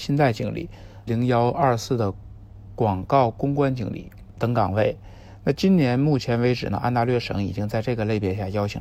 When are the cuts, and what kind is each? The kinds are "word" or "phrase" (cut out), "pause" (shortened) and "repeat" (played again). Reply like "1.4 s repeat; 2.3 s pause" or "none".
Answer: 1.1 s word